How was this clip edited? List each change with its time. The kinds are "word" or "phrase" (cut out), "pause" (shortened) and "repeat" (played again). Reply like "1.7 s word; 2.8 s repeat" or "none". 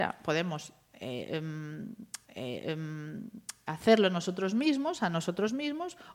2.2 s repeat